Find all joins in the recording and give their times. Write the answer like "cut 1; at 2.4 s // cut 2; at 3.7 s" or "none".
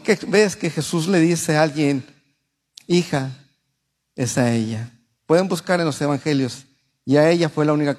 none